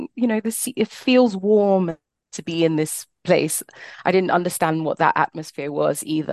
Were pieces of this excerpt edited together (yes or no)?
no